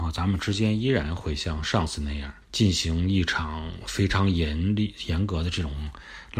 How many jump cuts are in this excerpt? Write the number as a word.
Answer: one